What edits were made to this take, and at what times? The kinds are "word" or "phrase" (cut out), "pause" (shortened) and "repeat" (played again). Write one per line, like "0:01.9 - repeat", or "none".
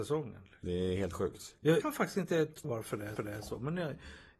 0:01.8 - phrase
0:02.6 - word
0:03.2 - repeat